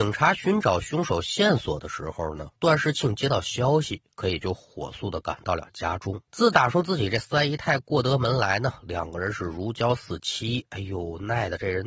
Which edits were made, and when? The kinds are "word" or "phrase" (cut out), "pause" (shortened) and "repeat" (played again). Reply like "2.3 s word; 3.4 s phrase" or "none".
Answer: 2.6 s pause; 6.3 s pause